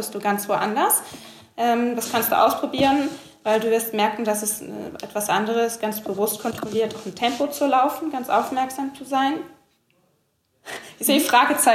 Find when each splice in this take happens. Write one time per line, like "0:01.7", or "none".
none